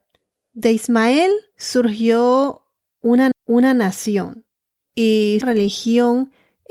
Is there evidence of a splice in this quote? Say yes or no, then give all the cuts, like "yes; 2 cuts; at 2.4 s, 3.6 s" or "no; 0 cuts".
yes; 2 cuts; at 3.3 s, 5.4 s